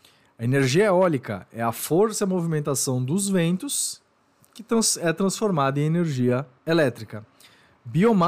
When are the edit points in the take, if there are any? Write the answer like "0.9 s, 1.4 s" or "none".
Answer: 6.6 s